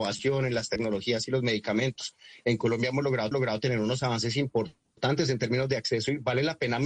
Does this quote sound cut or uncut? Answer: cut